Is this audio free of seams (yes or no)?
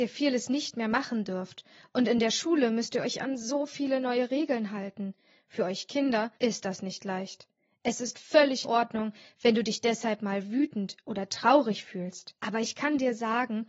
no